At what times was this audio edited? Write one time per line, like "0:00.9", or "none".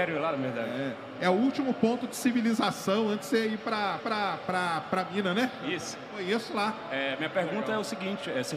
0:04.0